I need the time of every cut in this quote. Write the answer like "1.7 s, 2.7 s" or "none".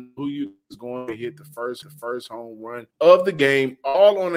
1.8 s, 2.9 s